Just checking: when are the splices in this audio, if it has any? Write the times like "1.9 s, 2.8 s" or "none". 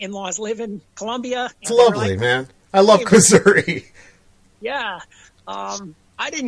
0.9 s, 1.6 s, 2.6 s, 3.1 s